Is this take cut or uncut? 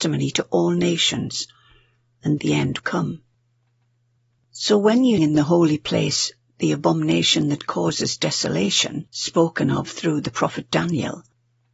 cut